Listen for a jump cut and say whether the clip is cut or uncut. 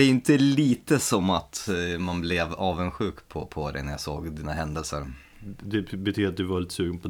uncut